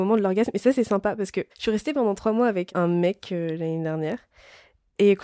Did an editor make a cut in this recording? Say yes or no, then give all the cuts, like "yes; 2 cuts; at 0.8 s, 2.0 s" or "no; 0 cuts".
yes; 1 cut; at 1.5 s